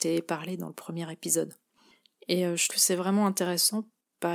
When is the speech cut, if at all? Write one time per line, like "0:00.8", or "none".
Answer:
0:02.7

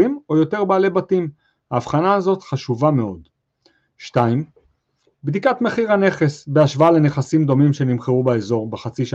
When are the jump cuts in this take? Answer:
none

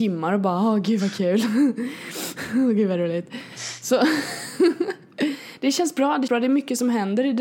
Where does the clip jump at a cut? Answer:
0:06.3

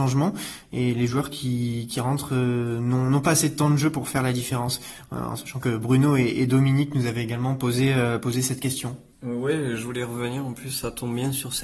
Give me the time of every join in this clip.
0:09.1

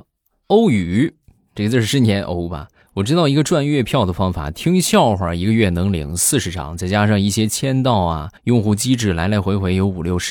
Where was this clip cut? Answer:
0:01.6
0:02.8
0:08.4

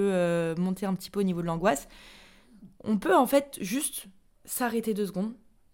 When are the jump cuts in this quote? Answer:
none

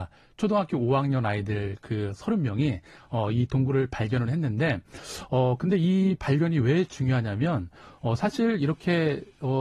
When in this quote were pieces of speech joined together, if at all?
none

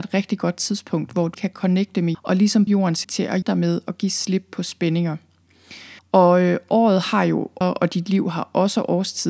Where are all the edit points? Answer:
0:01.3
0:02.1
0:02.7
0:03.0
0:03.4
0:06.0
0:07.6

